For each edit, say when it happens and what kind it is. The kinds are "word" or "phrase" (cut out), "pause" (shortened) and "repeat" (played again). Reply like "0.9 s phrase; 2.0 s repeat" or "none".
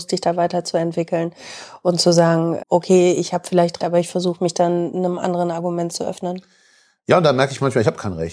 2.6 s word; 3.8 s word